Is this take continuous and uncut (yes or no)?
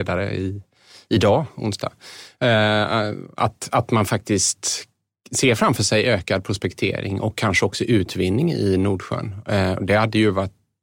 yes